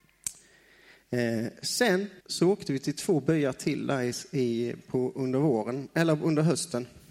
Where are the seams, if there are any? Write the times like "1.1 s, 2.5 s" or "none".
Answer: 2.2 s